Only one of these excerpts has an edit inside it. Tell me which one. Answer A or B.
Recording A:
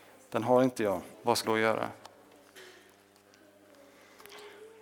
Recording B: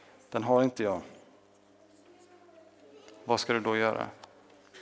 A